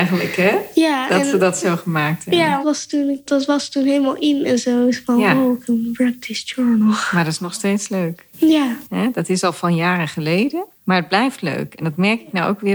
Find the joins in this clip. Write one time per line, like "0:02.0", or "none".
0:02.6
0:03.3
0:10.7